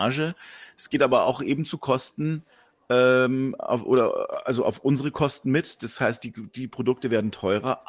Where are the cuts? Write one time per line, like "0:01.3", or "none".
none